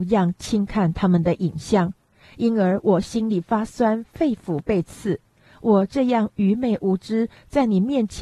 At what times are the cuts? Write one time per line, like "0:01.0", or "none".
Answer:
none